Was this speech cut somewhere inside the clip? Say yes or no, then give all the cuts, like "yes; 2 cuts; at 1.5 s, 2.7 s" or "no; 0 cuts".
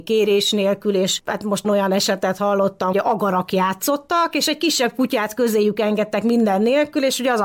yes; 2 cuts; at 1.6 s, 2.9 s